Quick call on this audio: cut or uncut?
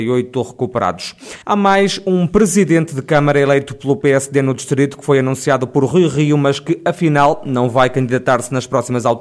cut